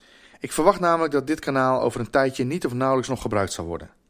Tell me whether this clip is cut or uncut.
uncut